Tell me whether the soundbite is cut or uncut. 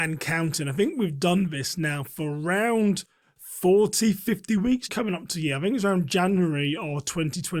cut